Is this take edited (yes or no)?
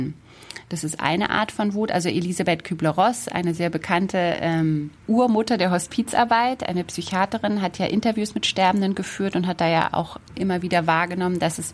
no